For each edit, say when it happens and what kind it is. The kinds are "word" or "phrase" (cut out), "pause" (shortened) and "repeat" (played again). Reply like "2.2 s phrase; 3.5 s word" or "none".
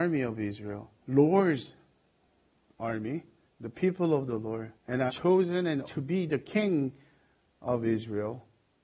1.0 s pause; 3.5 s pause; 4.8 s pause; 5.1 s word; 5.9 s word